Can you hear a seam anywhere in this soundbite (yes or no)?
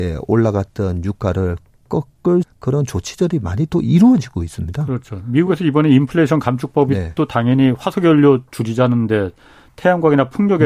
yes